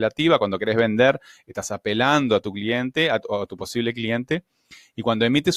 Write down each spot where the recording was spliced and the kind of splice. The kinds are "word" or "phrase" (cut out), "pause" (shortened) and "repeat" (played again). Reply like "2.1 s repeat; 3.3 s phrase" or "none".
none